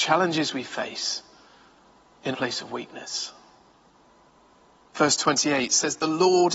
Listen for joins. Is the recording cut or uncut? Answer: cut